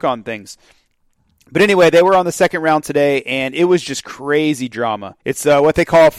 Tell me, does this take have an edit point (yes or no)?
yes